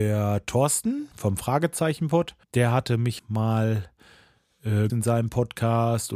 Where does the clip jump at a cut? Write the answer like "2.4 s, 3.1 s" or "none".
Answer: 1.1 s, 2.4 s, 3.2 s, 4.9 s